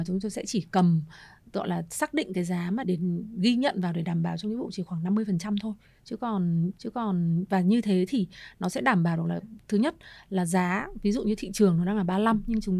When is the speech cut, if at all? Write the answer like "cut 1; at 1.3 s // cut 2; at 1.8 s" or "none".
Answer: cut 1; at 2.8 s // cut 2; at 6.7 s